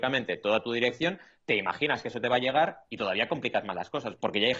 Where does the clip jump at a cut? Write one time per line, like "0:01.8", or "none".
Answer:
none